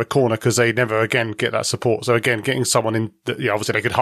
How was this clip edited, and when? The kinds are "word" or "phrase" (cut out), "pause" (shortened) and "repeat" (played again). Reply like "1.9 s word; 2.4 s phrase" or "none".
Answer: none